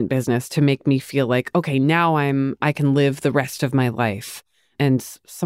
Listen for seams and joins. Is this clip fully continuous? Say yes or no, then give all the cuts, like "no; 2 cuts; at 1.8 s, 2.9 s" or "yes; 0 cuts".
yes; 0 cuts